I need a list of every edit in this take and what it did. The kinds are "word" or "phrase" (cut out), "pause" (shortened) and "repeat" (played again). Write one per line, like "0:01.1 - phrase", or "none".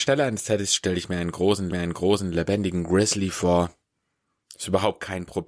0:01.7 - repeat